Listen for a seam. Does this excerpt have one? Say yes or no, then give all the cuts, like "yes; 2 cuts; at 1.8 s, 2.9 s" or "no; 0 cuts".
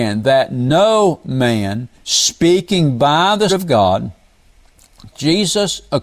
yes; 3 cuts; at 1.9 s, 3.5 s, 5.1 s